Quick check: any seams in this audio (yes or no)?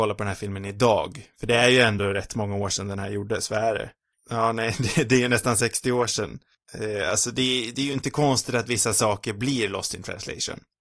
no